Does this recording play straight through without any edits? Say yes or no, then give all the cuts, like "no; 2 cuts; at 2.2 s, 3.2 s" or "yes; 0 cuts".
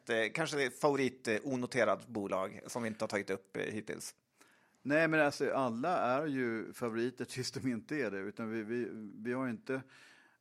yes; 0 cuts